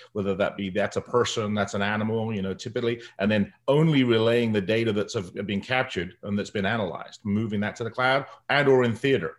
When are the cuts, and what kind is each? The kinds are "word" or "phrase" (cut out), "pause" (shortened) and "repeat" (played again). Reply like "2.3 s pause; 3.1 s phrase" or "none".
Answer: none